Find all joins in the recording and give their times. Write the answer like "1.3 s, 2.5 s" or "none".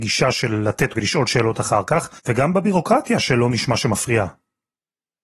0.9 s, 2.2 s